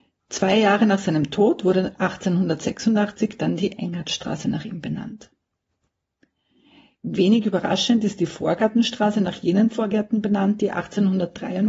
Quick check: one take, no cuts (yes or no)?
yes